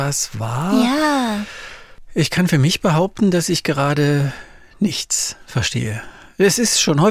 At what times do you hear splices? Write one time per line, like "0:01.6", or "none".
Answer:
none